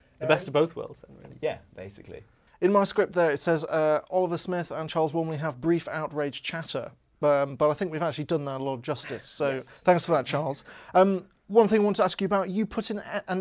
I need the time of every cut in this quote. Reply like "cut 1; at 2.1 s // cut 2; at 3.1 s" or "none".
none